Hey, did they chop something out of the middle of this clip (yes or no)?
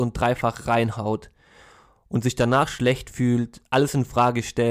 no